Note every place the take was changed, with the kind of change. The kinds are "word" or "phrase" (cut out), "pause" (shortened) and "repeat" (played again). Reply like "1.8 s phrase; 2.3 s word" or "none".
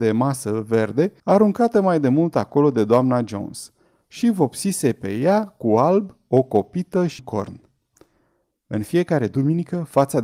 1.2 s pause; 7.2 s word